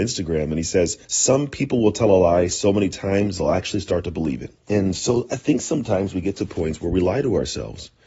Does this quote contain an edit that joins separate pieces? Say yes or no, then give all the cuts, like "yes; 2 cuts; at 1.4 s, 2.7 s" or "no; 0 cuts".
yes; 2 cuts; at 1.0 s, 4.6 s